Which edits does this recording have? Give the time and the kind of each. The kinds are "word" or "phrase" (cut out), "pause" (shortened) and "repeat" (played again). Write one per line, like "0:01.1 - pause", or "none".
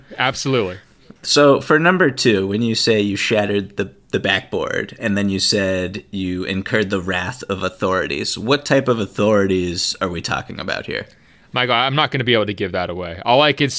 none